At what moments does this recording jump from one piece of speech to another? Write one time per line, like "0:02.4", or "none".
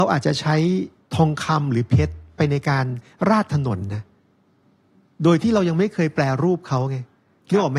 0:01.0